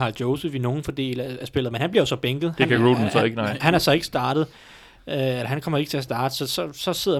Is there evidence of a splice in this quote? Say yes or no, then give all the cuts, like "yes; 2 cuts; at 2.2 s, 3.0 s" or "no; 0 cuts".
no; 0 cuts